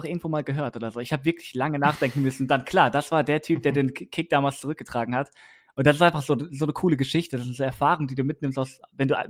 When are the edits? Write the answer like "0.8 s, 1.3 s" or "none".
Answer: none